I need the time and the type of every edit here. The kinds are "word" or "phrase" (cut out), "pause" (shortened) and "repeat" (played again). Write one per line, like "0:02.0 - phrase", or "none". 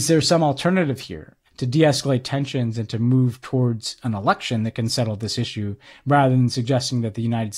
0:01.5 - pause